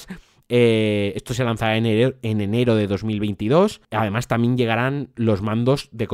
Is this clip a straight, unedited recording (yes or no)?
yes